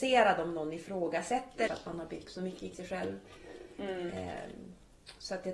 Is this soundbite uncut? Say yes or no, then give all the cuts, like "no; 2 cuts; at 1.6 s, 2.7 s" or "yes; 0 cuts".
no; 3 cuts; at 1.7 s, 2.2 s, 2.7 s